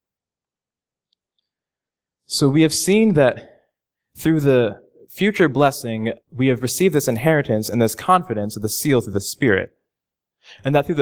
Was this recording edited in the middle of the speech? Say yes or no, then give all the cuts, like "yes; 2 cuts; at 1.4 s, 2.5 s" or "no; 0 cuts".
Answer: yes; 1 cut; at 6.2 s